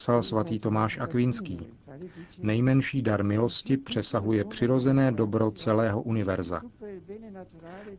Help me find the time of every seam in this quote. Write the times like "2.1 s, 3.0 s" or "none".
none